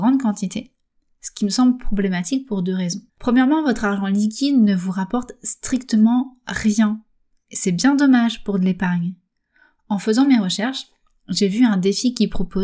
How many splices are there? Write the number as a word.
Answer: one